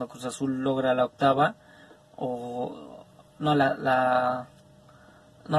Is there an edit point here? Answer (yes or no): no